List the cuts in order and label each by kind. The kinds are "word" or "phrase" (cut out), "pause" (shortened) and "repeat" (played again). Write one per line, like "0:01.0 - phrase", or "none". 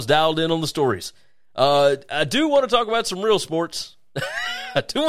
none